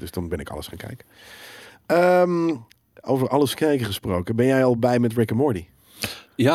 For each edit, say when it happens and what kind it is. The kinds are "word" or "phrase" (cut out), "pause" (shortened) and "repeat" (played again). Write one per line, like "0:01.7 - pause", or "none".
none